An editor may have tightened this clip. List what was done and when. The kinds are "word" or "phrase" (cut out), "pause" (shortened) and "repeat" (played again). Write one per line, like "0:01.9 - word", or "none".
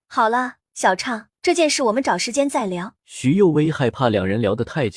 0:01.4 - pause
0:03.0 - pause